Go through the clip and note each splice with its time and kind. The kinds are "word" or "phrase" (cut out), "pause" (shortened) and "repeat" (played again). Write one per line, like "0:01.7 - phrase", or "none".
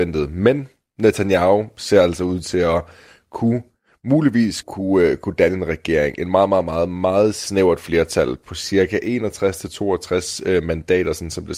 0:04.6 - word